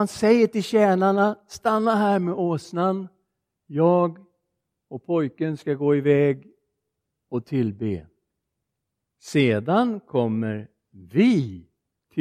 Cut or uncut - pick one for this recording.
uncut